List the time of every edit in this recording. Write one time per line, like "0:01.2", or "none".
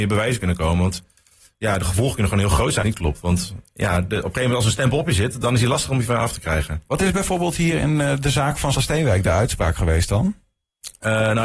0:02.8
0:08.7